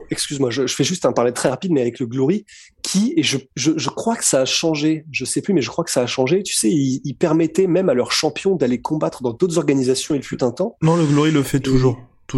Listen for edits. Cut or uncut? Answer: uncut